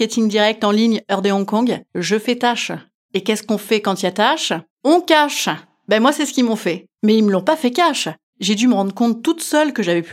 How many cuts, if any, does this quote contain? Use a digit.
0